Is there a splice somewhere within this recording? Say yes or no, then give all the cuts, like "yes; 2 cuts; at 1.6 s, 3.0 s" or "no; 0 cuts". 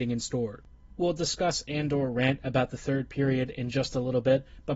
no; 0 cuts